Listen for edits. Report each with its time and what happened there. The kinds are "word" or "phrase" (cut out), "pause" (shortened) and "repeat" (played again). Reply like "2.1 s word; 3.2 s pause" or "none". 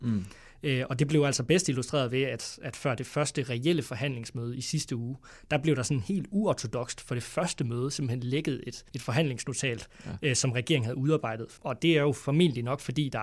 8.9 s pause; 11.6 s pause